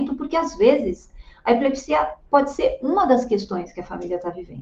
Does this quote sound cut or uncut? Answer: uncut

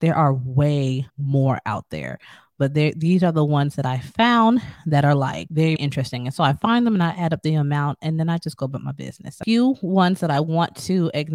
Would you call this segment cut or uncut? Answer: cut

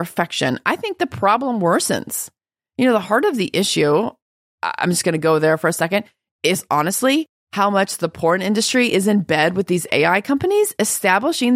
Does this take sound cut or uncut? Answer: uncut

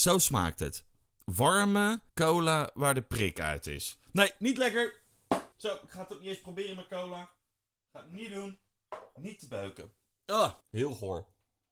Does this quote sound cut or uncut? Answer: cut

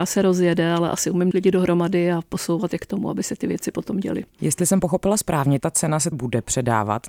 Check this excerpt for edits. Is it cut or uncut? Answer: cut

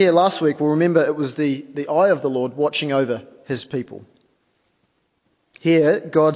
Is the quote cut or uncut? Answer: uncut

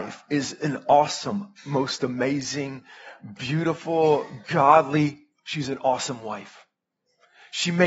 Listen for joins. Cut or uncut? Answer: uncut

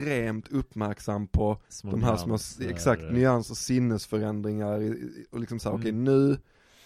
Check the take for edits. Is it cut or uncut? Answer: cut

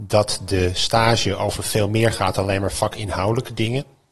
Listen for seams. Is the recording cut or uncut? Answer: uncut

